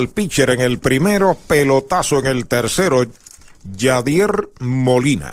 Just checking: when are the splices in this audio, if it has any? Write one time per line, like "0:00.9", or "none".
none